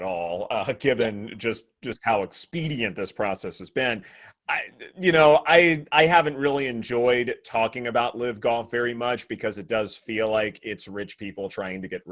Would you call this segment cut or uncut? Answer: uncut